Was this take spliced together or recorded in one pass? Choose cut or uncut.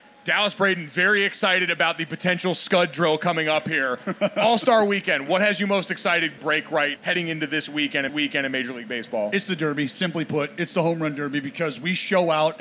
cut